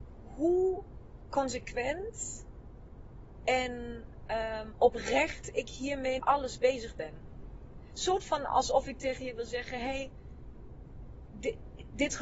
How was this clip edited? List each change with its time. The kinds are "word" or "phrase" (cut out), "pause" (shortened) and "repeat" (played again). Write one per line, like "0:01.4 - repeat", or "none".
0:06.2 - word

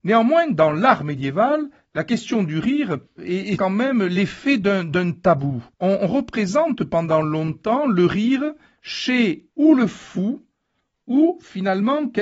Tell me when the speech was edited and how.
0:03.2 - word
0:03.6 - word
0:05.7 - pause
0:09.5 - pause

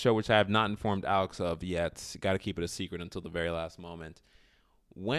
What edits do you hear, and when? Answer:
none

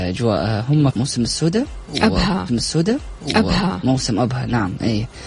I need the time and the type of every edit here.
0:00.9 - phrase
0:02.5 - repeat

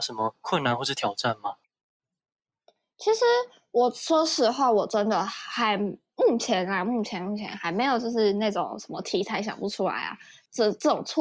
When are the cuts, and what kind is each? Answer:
none

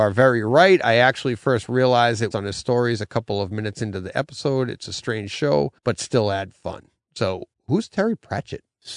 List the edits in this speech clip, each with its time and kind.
0:02.3 - phrase
0:05.8 - pause
0:07.5 - word

